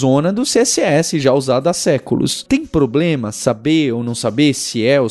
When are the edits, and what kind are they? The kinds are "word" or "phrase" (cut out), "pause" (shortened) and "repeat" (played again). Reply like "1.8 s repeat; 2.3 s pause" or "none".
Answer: none